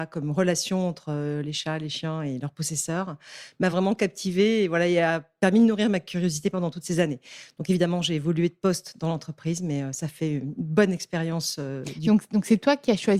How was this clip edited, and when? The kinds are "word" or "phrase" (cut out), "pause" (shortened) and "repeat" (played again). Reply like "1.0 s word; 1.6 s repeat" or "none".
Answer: none